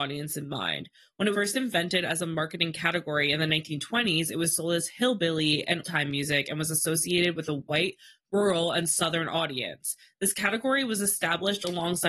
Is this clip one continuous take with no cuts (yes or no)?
no